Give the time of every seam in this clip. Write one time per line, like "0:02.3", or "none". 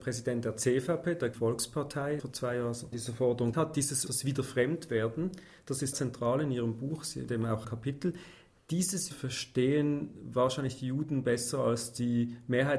0:01.3
0:02.2
0:02.9
0:03.5
0:04.1
0:05.9
0:07.3
0:07.6
0:09.1